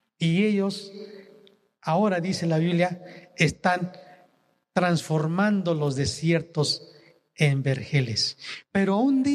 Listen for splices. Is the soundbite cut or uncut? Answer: uncut